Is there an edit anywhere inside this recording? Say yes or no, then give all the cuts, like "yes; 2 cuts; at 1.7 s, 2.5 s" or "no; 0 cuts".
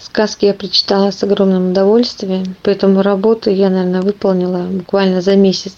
no; 0 cuts